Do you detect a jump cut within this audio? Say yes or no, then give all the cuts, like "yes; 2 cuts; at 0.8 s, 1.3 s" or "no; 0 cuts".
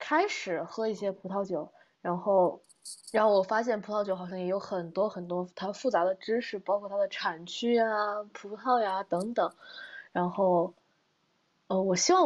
yes; 1 cut; at 3.0 s